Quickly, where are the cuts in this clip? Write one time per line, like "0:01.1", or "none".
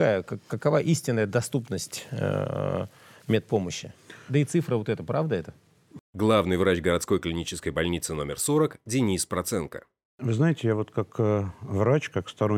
none